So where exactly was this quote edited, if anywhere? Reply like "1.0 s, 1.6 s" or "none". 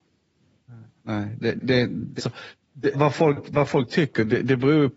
1.6 s, 2.2 s, 2.9 s